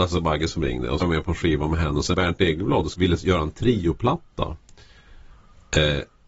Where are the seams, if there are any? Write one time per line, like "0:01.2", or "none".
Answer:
0:01.0
0:02.1
0:02.9